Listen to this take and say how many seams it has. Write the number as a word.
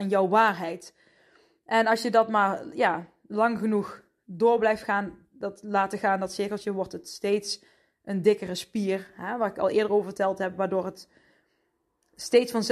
zero